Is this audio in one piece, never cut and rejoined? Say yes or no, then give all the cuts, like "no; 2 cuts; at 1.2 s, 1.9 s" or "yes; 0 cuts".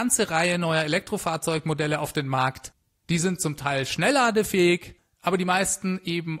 yes; 0 cuts